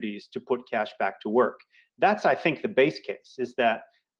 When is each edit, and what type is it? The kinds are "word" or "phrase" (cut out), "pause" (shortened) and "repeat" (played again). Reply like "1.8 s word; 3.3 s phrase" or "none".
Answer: none